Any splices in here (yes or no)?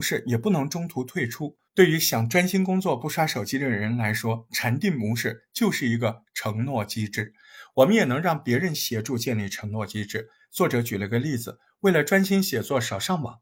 yes